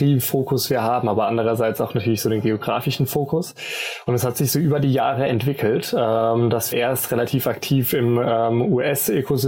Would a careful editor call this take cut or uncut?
cut